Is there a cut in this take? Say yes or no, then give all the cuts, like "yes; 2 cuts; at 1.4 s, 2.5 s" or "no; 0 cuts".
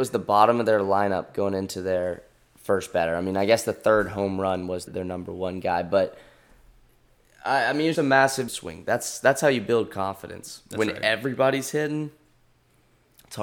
yes; 3 cuts; at 4.9 s, 7.9 s, 8.5 s